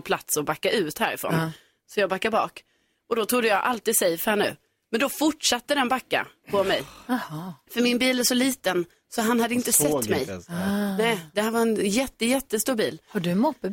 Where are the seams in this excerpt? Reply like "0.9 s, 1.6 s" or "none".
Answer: none